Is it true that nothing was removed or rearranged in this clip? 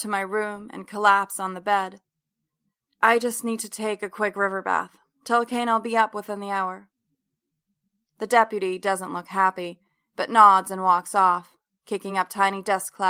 yes; 0 cuts

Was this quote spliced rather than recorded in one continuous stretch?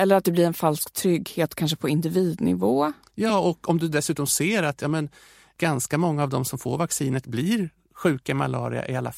no; 0 cuts

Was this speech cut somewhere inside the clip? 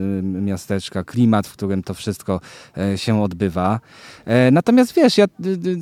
no; 0 cuts

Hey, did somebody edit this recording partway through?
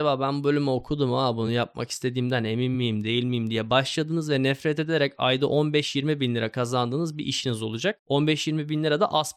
no; 0 cuts

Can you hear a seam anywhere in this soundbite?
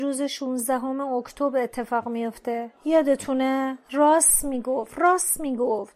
no; 0 cuts

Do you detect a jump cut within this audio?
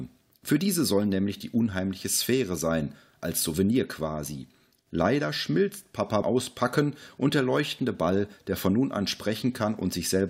yes; 1 cut; at 6.2 s

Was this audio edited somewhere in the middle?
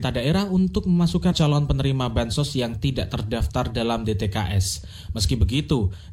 yes; 1 cut; at 1.3 s

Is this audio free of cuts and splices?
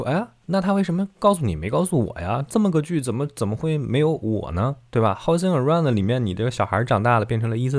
yes; 0 cuts

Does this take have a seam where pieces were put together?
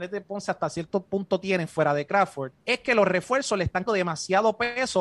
yes; 2 cuts; at 2.6 s, 3.9 s

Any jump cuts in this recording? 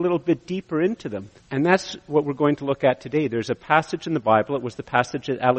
yes; 1 cut; at 1.4 s

